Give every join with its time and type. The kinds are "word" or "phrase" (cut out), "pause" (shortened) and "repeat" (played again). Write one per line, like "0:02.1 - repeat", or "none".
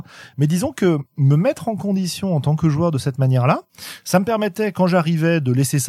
none